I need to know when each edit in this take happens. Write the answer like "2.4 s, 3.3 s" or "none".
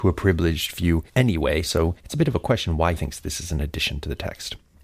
1.1 s, 2.0 s, 3.0 s